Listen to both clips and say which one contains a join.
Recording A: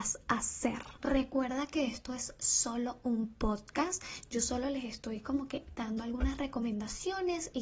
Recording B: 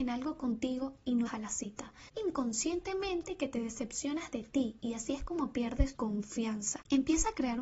B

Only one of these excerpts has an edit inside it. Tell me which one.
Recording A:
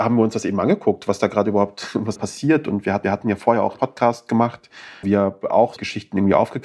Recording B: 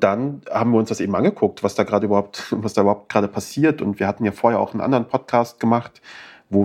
A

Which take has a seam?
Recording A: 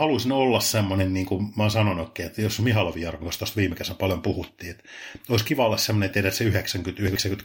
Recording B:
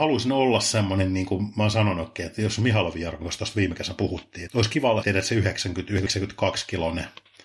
B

